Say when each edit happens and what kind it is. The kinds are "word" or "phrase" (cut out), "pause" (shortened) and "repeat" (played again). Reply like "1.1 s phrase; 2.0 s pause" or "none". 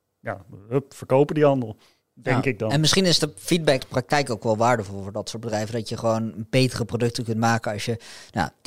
3.8 s word